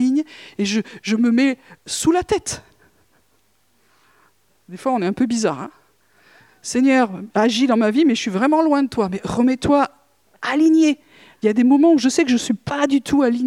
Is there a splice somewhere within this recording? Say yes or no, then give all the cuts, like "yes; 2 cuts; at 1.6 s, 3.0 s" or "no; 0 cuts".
no; 0 cuts